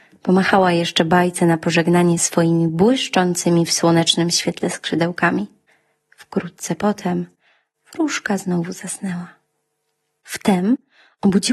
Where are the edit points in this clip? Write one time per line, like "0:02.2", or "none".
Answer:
none